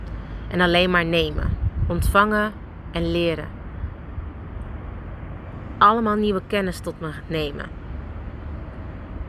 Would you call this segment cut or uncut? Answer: uncut